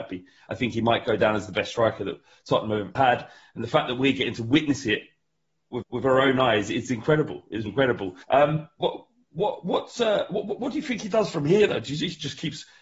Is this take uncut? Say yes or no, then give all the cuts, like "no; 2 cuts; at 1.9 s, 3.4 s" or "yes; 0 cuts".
no; 4 cuts; at 3.0 s, 5.8 s, 7.7 s, 8.2 s